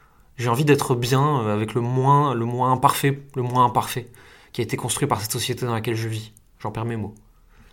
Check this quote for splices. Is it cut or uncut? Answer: uncut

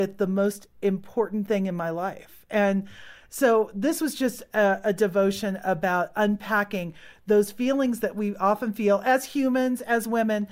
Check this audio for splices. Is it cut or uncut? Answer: uncut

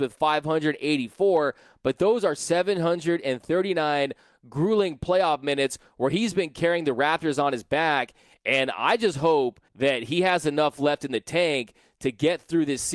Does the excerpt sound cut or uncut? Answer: cut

